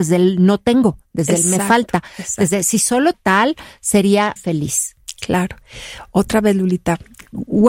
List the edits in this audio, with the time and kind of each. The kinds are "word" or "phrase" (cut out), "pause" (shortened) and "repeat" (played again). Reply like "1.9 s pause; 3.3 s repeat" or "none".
3.1 s word; 4.4 s word